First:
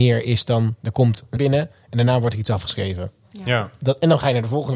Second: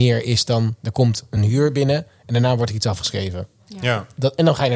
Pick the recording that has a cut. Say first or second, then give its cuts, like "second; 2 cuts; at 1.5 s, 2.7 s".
first; 1 cut; at 1.4 s